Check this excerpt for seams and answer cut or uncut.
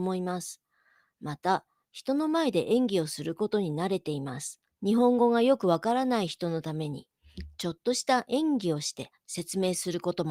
cut